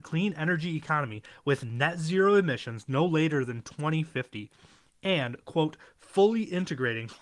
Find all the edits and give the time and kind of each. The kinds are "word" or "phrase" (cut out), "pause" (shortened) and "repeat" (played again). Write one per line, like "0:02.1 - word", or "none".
none